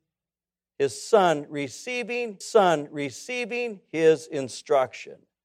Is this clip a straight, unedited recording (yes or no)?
no